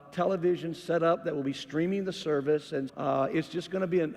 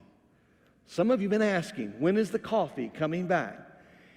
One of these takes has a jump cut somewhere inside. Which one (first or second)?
first